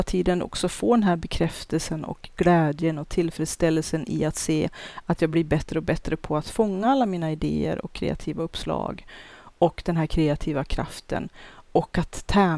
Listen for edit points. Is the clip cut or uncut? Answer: uncut